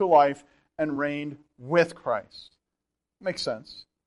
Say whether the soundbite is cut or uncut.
uncut